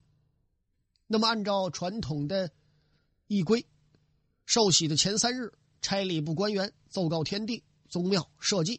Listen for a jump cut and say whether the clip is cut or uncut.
uncut